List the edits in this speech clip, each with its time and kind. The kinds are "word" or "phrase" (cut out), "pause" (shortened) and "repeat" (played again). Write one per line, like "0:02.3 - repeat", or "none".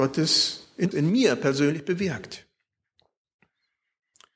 0:00.9 - word